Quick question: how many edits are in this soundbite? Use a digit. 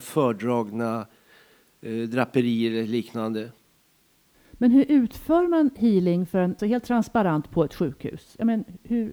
1